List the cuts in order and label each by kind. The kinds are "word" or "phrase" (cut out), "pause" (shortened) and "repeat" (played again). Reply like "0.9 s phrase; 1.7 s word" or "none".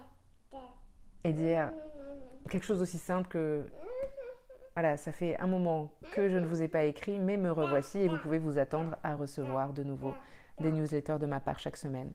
none